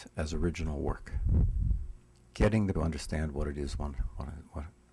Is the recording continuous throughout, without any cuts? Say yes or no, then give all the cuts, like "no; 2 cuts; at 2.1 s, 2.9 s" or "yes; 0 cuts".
no; 2 cuts; at 2.1 s, 2.7 s